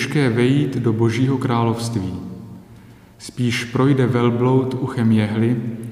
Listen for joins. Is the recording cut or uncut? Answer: uncut